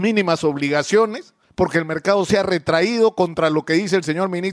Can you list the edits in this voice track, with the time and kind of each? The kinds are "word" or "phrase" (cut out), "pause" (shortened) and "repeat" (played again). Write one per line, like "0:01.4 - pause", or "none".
none